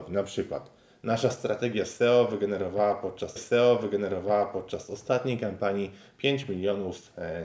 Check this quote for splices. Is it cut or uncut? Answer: cut